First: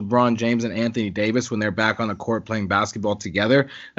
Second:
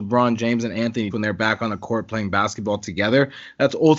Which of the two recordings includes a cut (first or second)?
second